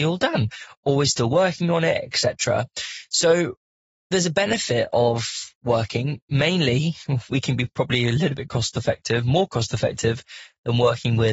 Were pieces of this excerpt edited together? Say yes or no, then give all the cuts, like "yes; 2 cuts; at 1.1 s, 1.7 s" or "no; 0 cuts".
no; 0 cuts